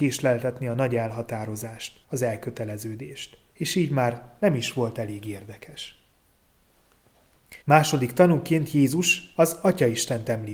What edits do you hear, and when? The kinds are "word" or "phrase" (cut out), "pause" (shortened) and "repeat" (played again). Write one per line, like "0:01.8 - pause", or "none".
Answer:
0:02.0 - pause
0:03.5 - pause
0:07.6 - pause